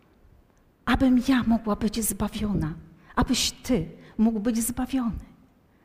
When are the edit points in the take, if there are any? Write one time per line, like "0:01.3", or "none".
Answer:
none